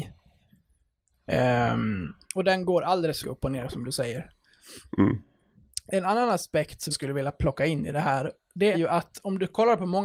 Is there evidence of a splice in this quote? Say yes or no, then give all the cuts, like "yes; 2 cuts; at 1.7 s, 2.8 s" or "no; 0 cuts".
yes; 3 cuts; at 3.2 s, 6.9 s, 8.7 s